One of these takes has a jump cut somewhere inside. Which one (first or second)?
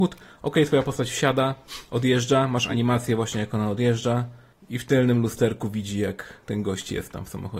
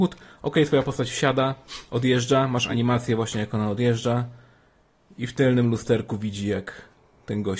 first